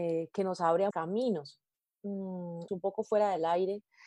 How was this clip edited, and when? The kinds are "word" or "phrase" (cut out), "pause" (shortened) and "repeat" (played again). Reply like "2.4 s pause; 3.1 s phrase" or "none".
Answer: 0.9 s word; 2.7 s word